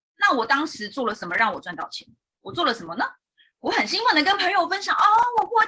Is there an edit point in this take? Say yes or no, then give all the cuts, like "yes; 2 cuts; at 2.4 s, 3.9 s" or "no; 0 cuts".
no; 0 cuts